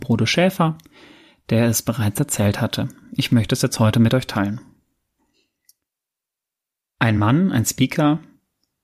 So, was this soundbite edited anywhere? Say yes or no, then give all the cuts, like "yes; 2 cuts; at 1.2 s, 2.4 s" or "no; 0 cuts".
no; 0 cuts